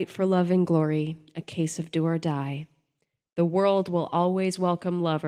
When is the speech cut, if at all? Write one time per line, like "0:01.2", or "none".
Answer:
none

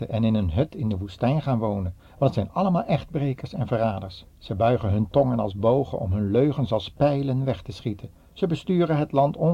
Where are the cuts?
0:02.0
0:04.3
0:08.2

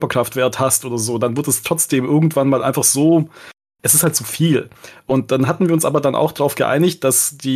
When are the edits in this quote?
none

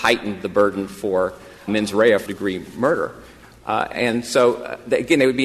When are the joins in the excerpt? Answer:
0:01.7
0:02.3
0:03.9

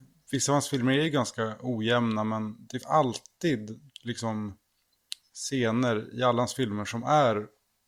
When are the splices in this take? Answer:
0:02.8
0:03.9

